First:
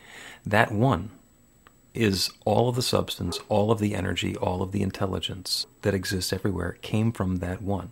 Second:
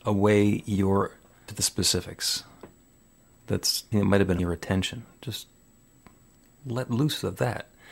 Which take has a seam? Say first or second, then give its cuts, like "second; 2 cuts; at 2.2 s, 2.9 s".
second; 3 cuts; at 1.5 s, 3.9 s, 4.4 s